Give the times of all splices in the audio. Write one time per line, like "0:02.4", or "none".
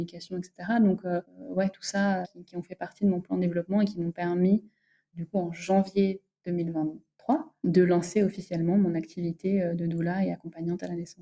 0:02.2